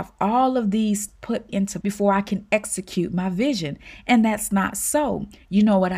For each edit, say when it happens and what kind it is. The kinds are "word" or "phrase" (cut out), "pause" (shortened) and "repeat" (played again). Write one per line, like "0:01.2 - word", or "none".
0:01.1 - word
0:01.5 - word
0:01.8 - word